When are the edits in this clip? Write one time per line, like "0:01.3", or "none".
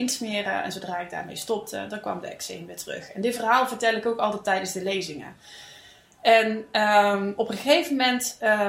none